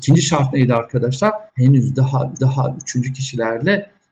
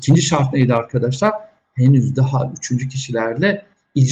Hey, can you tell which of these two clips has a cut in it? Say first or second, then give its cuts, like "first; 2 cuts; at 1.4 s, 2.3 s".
first; 2 cuts; at 1.5 s, 2.4 s